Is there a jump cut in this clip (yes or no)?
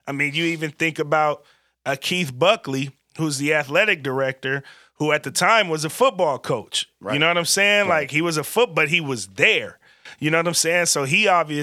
no